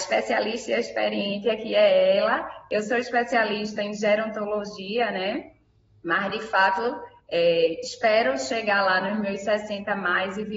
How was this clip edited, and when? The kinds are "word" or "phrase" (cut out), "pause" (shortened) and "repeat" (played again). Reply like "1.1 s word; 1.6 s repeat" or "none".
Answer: none